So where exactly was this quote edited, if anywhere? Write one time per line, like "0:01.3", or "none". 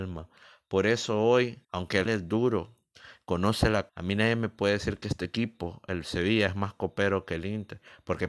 0:01.6
0:02.1
0:03.9